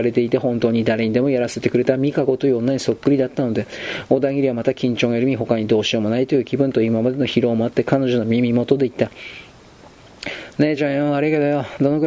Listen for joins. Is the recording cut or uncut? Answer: uncut